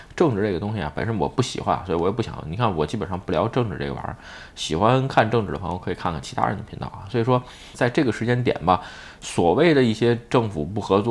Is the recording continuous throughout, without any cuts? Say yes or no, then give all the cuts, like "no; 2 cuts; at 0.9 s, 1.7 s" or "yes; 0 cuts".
no; 1 cut; at 7.7 s